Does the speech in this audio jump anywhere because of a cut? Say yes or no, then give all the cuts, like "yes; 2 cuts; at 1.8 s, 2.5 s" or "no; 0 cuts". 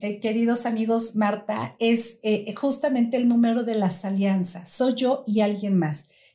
no; 0 cuts